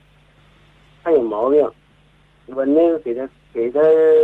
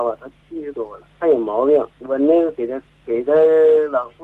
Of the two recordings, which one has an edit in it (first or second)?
second